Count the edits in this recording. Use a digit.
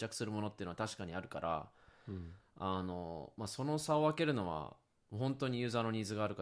0